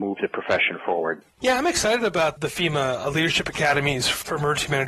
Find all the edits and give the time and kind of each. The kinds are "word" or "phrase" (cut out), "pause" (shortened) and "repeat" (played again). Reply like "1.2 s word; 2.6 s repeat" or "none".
none